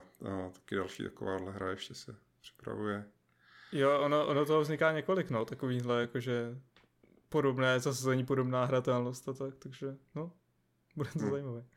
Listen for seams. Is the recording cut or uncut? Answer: uncut